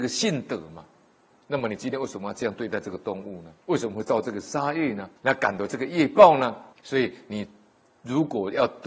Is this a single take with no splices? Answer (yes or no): no